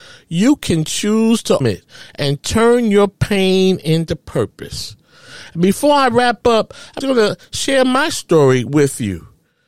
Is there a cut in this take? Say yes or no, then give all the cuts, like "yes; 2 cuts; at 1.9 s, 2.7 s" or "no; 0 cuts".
yes; 2 cuts; at 1.6 s, 7.0 s